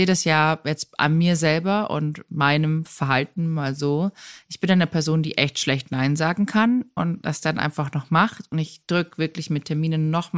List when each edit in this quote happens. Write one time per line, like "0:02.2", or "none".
none